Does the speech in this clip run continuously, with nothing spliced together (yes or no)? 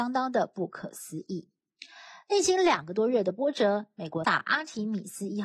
no